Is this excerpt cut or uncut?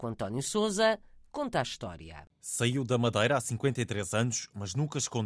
uncut